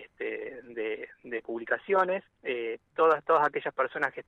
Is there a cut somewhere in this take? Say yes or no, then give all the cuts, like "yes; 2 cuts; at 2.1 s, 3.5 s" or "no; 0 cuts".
yes; 1 cut; at 2.3 s